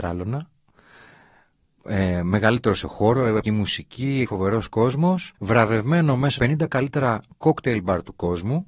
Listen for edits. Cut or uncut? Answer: cut